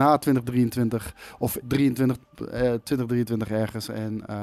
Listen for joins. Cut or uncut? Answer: cut